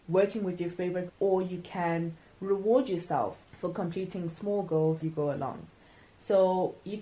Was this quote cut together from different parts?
yes; 3 cuts; at 1.1 s, 3.4 s, 5.0 s

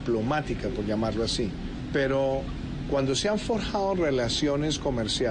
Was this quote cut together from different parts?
no; 0 cuts

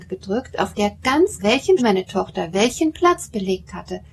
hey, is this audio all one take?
no; 2 cuts; at 1.4 s, 1.8 s

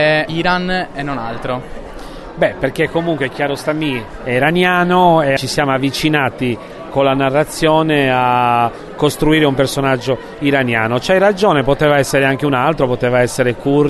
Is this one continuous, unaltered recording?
yes; 0 cuts

